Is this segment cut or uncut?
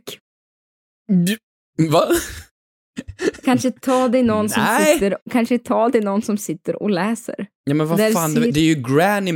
cut